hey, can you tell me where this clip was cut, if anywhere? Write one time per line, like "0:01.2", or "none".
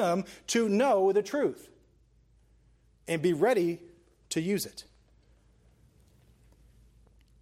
none